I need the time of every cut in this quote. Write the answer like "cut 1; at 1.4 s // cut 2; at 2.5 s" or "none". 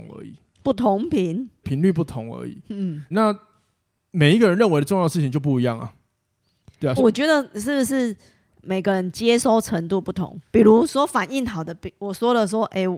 cut 1; at 1.6 s // cut 2; at 3.1 s // cut 3; at 7.0 s